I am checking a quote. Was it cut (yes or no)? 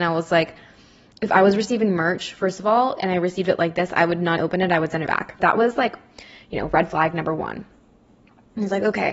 yes